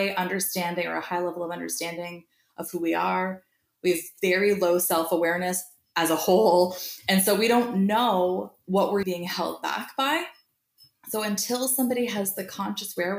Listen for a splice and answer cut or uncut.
cut